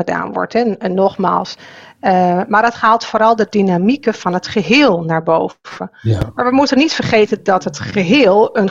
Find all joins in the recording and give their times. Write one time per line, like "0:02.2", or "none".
none